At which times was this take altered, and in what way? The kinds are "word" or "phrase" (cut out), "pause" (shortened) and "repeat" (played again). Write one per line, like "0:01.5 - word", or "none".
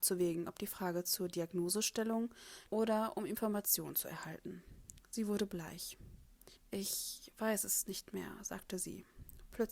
0:02.7 - word
0:05.0 - pause
0:06.6 - pause